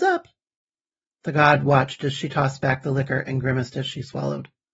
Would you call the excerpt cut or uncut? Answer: uncut